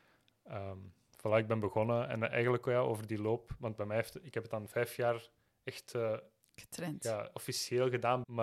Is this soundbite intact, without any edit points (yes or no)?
yes